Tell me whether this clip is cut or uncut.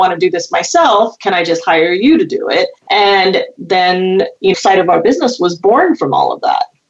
cut